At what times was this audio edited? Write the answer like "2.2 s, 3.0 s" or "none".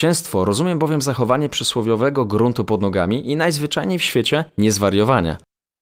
4.5 s